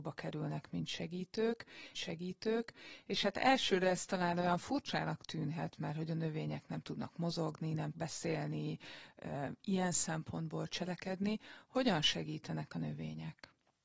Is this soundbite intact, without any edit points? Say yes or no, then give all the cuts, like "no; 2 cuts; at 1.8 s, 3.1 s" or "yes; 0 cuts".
no; 2 cuts; at 1.9 s, 7.9 s